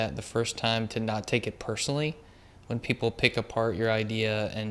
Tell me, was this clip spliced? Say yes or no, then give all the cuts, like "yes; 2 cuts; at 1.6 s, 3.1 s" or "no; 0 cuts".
no; 0 cuts